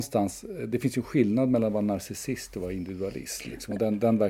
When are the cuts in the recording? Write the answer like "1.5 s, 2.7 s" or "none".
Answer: none